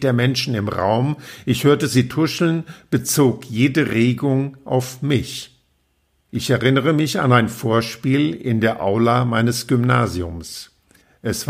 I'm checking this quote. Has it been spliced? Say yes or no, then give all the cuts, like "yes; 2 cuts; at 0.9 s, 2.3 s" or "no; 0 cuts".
no; 0 cuts